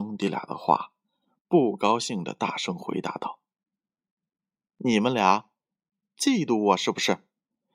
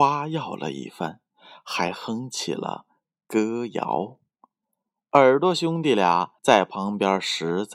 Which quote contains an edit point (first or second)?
second